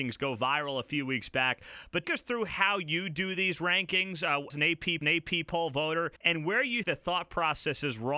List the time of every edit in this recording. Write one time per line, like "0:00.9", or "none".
0:02.0
0:04.5
0:05.0
0:06.2
0:06.8

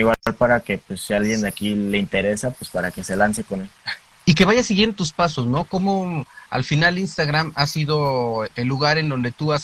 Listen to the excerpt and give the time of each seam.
none

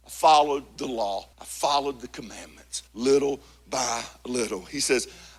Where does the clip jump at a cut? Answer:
0:01.3
0:02.9

